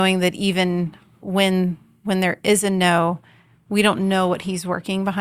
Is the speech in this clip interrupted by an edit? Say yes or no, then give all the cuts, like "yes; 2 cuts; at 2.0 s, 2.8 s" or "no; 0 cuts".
no; 0 cuts